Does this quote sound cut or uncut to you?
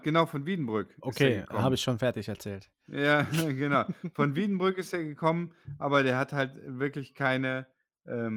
uncut